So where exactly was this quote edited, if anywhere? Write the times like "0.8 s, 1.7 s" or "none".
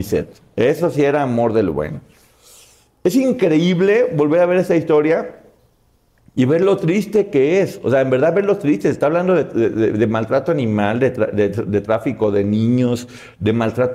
none